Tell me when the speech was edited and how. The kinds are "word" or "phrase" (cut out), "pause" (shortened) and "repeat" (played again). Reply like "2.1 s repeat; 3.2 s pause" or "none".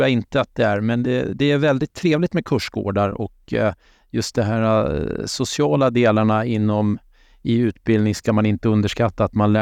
none